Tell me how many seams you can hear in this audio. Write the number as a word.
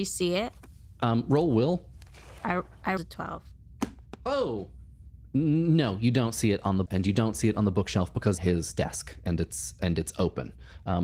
three